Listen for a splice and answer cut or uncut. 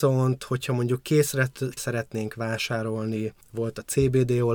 cut